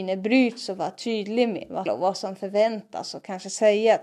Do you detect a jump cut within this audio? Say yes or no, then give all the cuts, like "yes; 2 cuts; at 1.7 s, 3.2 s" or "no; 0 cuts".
yes; 1 cut; at 1.9 s